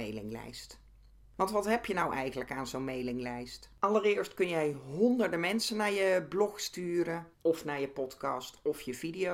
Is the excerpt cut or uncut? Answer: cut